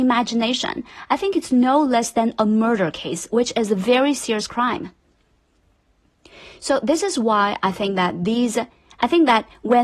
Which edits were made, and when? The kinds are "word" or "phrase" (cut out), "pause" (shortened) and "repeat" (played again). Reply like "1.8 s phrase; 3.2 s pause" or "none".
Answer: none